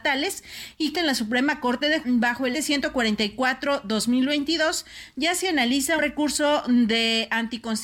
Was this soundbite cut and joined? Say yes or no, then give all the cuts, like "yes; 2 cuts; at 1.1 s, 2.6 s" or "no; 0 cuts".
yes; 4 cuts; at 0.9 s, 2.0 s, 2.5 s, 6.0 s